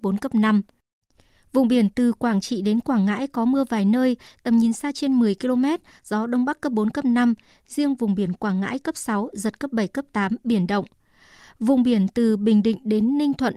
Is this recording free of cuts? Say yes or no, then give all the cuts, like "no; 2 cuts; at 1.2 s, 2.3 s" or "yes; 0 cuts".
yes; 0 cuts